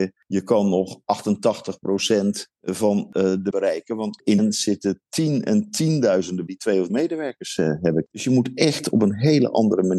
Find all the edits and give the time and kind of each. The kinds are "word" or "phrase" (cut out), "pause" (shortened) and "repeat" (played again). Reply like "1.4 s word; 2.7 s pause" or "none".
3.5 s word; 4.4 s word; 6.5 s word; 6.9 s word